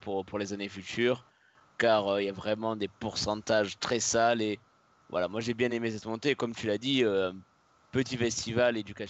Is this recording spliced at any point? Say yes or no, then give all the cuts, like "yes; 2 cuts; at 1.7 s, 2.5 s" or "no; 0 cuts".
no; 0 cuts